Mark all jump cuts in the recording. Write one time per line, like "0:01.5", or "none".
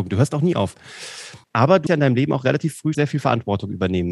0:01.4
0:01.9
0:02.9